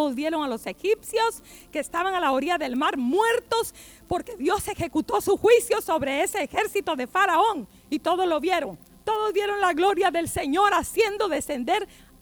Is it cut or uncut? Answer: cut